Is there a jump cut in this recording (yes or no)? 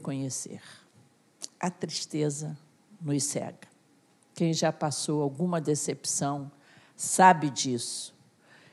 no